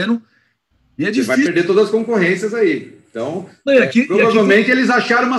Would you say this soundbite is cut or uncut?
uncut